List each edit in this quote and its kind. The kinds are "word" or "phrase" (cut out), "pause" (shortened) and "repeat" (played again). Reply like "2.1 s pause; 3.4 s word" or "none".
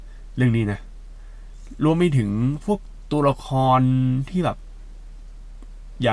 none